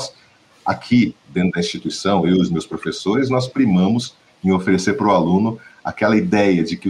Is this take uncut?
yes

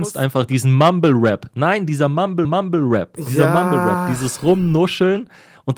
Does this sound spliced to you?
yes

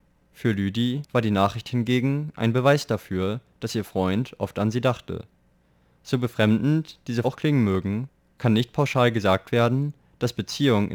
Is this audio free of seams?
no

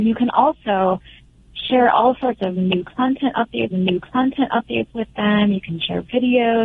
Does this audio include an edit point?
yes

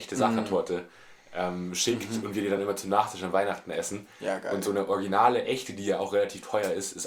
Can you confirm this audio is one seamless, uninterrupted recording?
yes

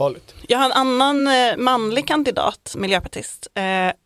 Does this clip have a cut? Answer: no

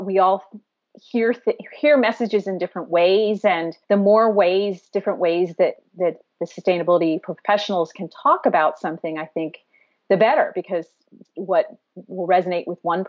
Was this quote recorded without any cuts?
no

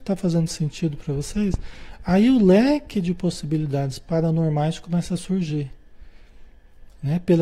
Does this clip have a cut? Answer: no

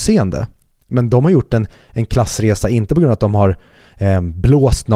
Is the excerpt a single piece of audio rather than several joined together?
yes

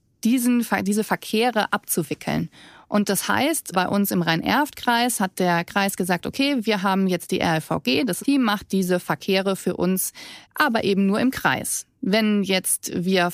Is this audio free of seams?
no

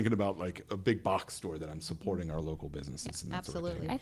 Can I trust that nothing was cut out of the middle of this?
yes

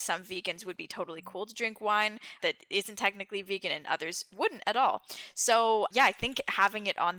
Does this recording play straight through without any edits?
no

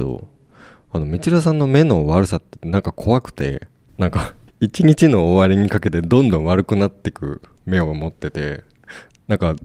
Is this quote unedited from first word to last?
no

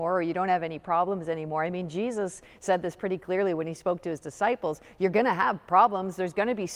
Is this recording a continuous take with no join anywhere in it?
yes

